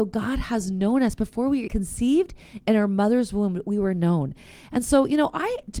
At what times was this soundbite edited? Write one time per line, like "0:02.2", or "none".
0:01.7

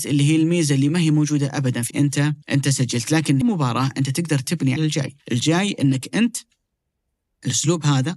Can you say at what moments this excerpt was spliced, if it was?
0:01.9
0:02.4
0:03.4
0:04.8
0:05.2

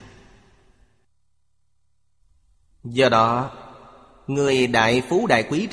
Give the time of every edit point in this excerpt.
none

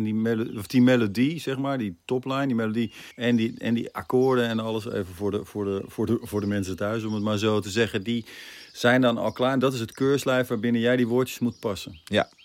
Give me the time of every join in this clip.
0:03.1

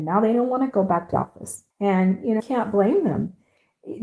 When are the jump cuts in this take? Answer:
0:01.1
0:01.7
0:02.4

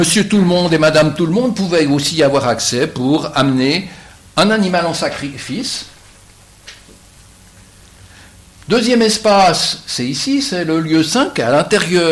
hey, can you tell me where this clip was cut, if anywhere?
none

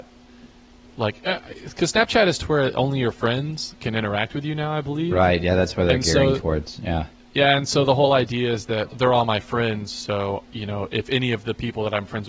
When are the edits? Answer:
0:08.9

